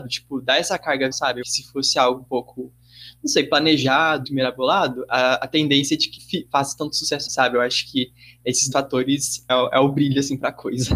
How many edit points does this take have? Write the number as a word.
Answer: seven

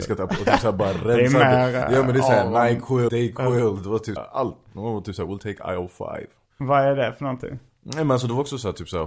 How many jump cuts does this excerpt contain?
two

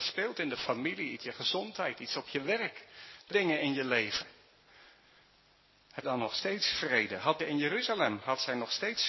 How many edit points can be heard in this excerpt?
four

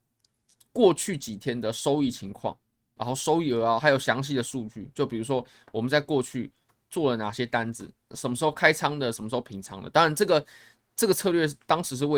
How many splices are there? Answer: zero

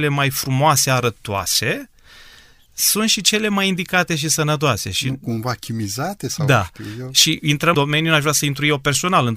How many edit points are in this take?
one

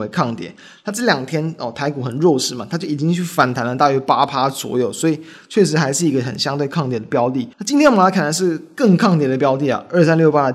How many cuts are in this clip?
one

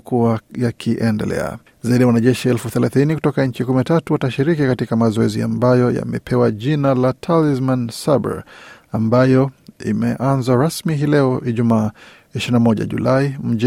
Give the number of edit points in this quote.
zero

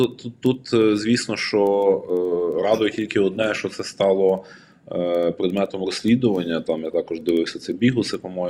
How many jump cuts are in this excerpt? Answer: zero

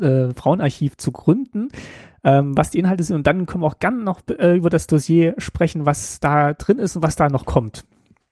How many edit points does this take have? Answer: zero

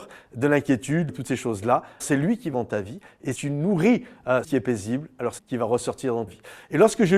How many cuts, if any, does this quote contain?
seven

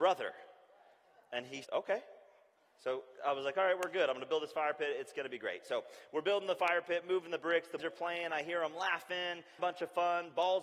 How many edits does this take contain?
three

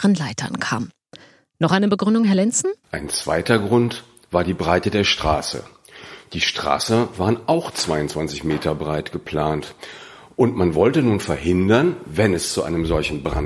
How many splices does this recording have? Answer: one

